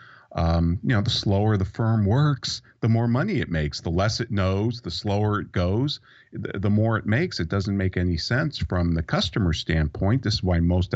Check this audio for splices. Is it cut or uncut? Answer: uncut